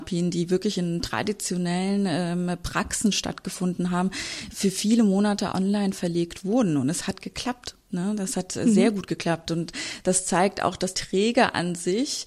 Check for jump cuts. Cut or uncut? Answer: cut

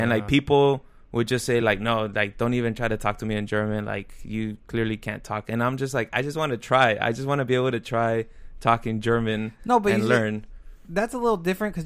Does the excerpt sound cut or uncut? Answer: uncut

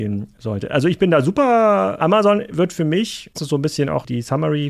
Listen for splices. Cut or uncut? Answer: cut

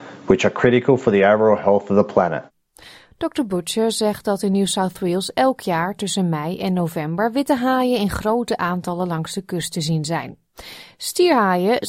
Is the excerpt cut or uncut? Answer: uncut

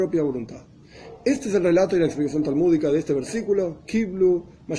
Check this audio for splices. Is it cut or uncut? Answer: uncut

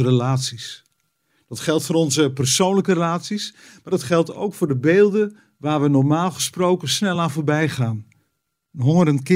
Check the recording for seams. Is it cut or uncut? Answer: uncut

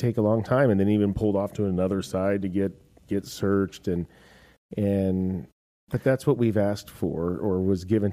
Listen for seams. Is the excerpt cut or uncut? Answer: uncut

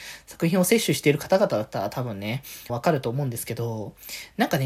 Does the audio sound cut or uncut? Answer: cut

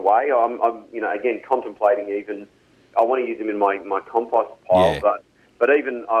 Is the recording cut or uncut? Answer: uncut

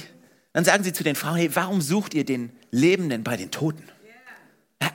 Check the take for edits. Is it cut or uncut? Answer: uncut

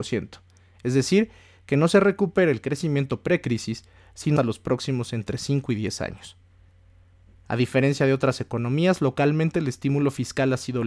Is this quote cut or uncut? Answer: cut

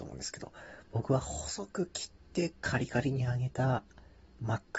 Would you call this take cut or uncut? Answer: uncut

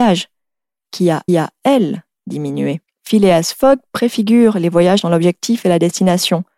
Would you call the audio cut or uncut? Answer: cut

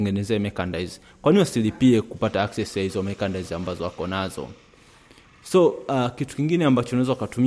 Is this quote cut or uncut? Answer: uncut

